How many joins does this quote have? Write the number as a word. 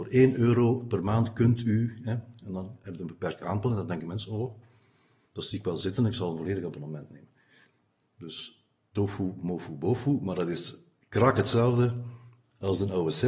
zero